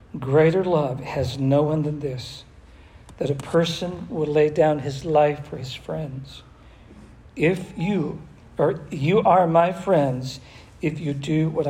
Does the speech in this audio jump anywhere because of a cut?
no; 0 cuts

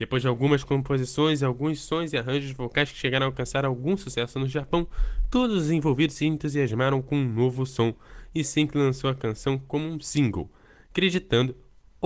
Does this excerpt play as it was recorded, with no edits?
yes; 0 cuts

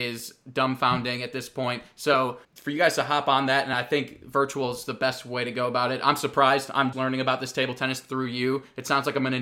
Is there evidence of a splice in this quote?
yes; 2 cuts; at 2.4 s, 6.9 s

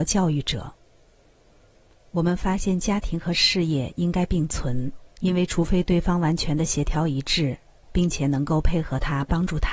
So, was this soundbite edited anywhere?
yes; 1 cut; at 5.1 s

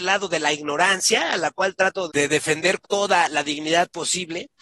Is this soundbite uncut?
no; 2 cuts; at 2.1 s, 2.8 s

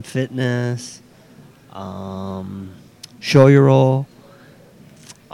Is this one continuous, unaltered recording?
yes; 0 cuts

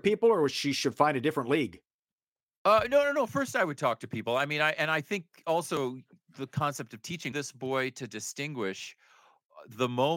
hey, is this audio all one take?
no; 1 cut; at 7.3 s

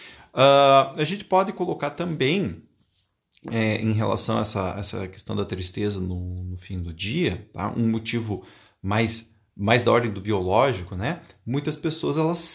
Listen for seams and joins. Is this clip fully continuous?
yes; 0 cuts

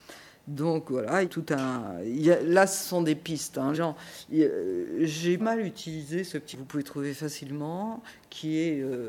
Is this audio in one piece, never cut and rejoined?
no; 4 cuts; at 1.2 s, 3.7 s, 5.4 s, 6.5 s

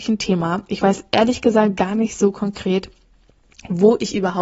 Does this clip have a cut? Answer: no; 0 cuts

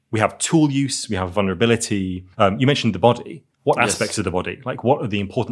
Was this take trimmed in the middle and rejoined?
yes; 1 cut; at 2.3 s

